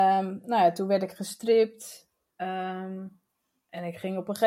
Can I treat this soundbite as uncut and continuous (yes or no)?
yes